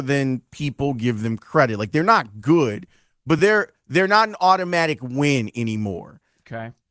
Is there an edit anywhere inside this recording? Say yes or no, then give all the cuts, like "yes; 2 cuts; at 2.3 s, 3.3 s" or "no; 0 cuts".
no; 0 cuts